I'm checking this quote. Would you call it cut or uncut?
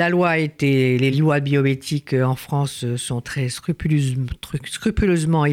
cut